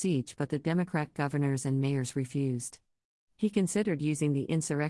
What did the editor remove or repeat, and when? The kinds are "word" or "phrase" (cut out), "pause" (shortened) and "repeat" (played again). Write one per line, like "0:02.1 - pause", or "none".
none

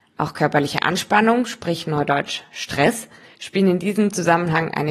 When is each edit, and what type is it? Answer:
none

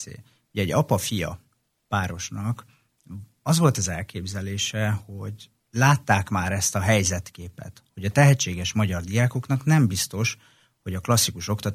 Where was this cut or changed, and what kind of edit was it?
none

